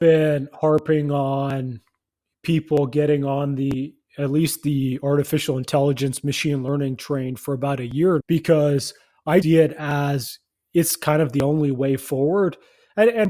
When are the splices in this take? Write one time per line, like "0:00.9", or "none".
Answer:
0:08.2
0:09.4